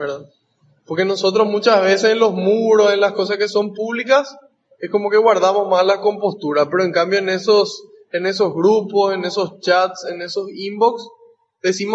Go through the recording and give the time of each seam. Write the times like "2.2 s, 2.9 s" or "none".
none